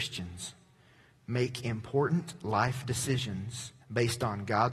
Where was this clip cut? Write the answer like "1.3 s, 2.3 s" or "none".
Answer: 3.8 s